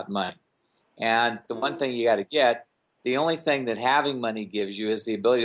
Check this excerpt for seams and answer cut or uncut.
uncut